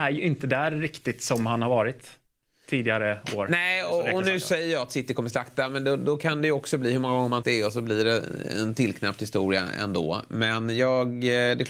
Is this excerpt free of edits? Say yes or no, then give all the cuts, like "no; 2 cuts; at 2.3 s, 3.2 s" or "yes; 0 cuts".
no; 1 cut; at 7.4 s